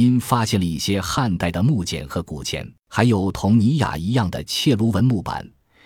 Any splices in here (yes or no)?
yes